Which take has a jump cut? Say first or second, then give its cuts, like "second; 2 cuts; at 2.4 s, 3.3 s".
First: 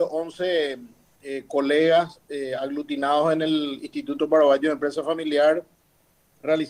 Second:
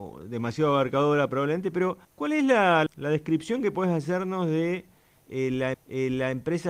second; 3 cuts; at 2.0 s, 2.9 s, 5.7 s